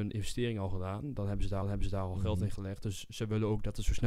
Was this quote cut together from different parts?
yes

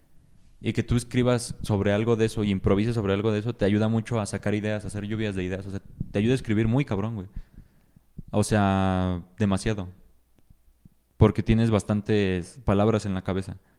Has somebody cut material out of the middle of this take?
no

